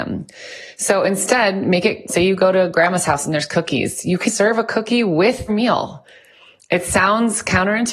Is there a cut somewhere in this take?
yes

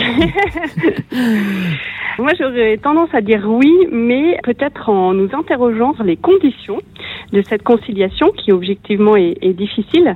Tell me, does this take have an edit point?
yes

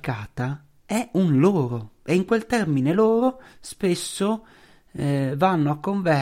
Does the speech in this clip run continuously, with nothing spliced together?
yes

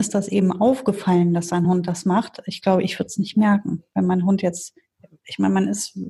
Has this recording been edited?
no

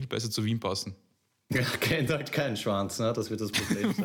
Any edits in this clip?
no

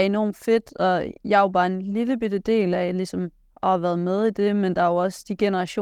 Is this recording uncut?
yes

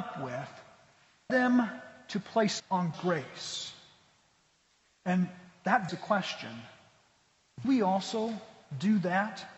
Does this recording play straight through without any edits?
no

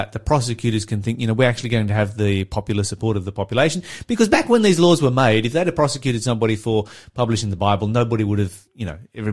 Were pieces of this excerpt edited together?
no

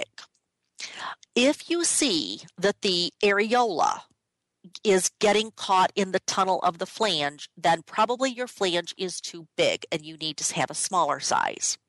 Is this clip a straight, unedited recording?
yes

